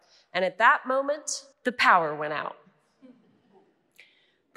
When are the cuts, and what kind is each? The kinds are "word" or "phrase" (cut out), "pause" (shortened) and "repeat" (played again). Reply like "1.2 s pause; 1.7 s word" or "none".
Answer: 1.5 s pause